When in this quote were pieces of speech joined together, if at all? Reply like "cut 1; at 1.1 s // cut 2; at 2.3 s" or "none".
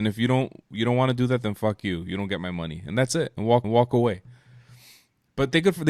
cut 1; at 3.6 s